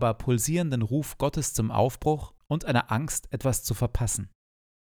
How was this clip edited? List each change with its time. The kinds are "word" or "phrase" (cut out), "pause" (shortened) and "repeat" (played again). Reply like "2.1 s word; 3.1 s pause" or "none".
2.4 s pause